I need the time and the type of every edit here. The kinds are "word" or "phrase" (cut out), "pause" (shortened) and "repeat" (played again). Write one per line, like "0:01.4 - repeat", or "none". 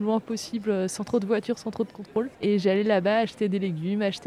0:02.3 - pause